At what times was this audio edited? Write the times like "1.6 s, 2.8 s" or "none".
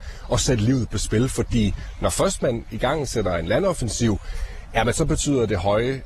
none